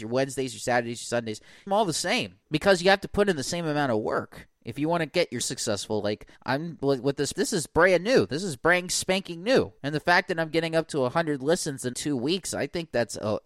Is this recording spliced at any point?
yes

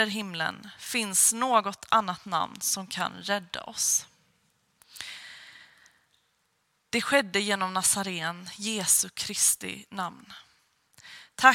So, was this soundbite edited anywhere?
no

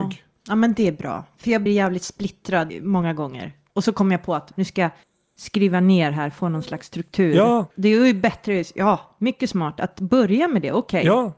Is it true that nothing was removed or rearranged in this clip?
no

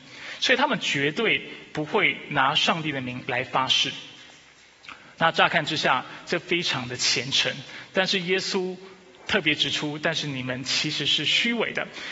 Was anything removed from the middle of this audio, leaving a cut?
no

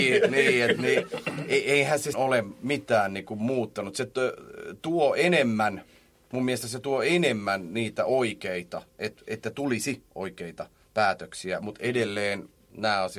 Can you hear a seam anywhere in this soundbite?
yes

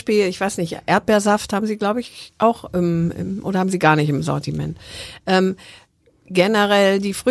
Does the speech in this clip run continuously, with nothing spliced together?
yes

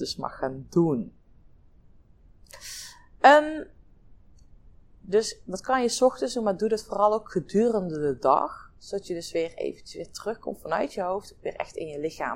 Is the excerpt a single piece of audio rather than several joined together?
yes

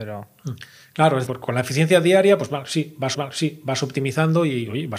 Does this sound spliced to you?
yes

